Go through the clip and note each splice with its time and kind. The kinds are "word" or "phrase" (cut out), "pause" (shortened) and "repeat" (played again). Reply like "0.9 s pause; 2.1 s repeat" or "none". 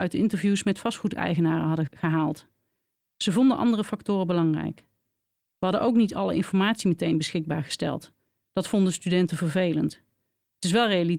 none

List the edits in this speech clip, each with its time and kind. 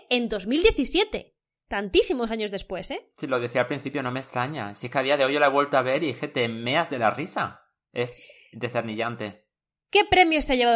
none

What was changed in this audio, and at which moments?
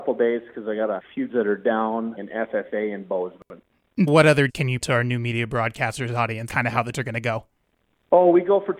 1.3 s word; 2.2 s word; 4.1 s word; 4.5 s word; 4.8 s word; 6.5 s word; 6.9 s word

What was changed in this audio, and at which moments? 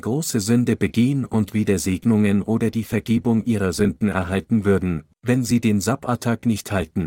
none

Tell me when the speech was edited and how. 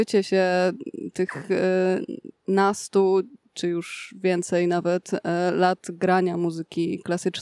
2.4 s pause

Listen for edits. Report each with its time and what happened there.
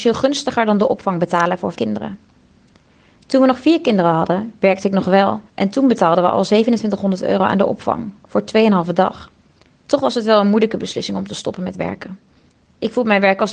1.7 s word; 5.5 s pause; 9.6 s pause

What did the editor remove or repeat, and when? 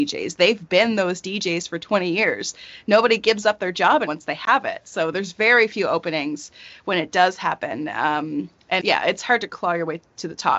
4.1 s word; 8.8 s word

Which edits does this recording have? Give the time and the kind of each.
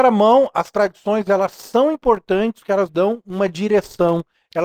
2.9 s word

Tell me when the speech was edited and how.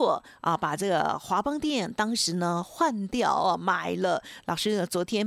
none

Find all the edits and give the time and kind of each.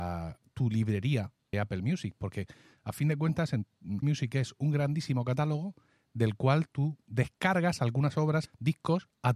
1.5 s word; 4.0 s word; 8.5 s word

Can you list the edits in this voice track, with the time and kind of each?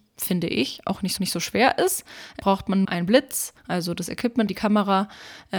1.2 s repeat; 2.4 s word; 2.8 s word; 3.6 s pause; 4.5 s word

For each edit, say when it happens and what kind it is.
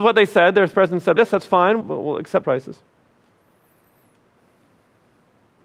1.2 s word; 1.8 s word; 2.4 s word

